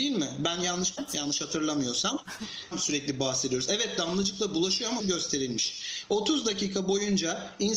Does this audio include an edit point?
yes; 3 cuts; at 1.0 s, 2.7 s, 5.0 s

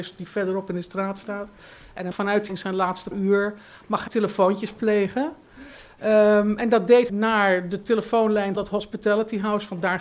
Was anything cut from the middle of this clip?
yes; 6 cuts; at 2.1 s, 2.5 s, 3.1 s, 4.1 s, 7.1 s, 8.6 s

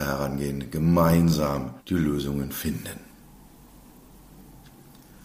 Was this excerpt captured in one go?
no; 1 cut; at 1.8 s

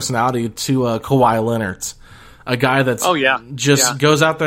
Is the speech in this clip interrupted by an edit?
no; 0 cuts

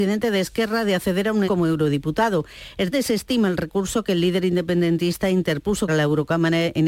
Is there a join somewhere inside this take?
yes; 3 cuts; at 1.5 s, 2.9 s, 5.9 s

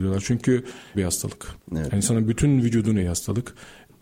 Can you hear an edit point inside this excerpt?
yes; 3 cuts; at 0.9 s, 1.6 s, 3.0 s

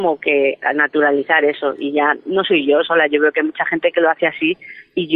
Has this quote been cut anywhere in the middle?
no; 0 cuts

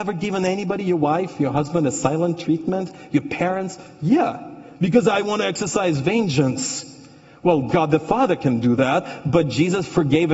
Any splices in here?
no; 0 cuts

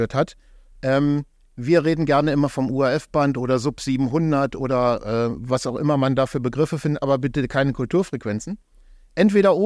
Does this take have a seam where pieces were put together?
no; 0 cuts

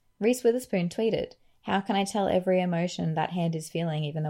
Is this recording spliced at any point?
no; 0 cuts

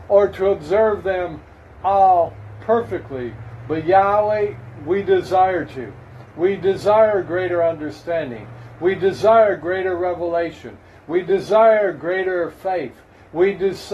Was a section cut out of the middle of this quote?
no; 0 cuts

